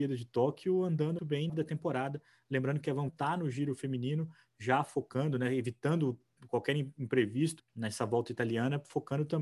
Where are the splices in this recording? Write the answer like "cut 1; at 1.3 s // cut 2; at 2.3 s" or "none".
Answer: cut 1; at 1.2 s // cut 2; at 1.5 s // cut 3; at 3.1 s // cut 4; at 7.6 s